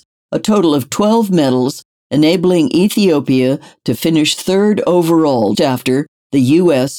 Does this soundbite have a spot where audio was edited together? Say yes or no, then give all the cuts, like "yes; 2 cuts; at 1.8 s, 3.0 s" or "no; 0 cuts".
yes; 1 cut; at 5.5 s